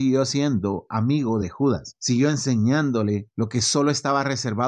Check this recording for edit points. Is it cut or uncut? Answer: uncut